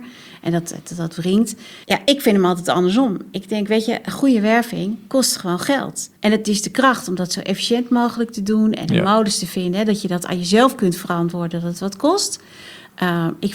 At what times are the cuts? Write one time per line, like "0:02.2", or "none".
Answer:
0:01.8
0:06.2